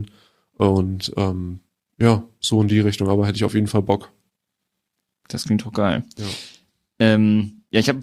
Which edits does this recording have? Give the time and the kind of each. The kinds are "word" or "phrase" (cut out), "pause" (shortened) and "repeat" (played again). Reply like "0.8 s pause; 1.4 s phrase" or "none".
none